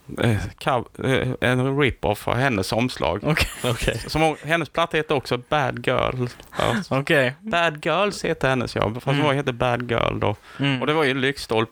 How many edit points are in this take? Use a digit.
1